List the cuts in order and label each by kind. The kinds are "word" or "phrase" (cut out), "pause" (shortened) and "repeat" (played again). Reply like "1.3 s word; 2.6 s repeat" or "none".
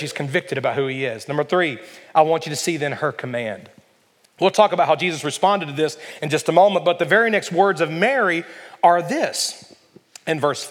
none

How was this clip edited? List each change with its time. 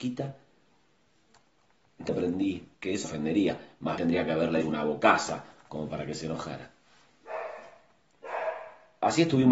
2.1 s word; 2.7 s pause; 3.0 s phrase; 4.0 s word; 4.6 s word

